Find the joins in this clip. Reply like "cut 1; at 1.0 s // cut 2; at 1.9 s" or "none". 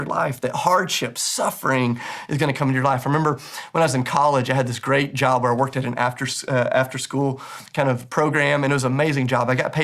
none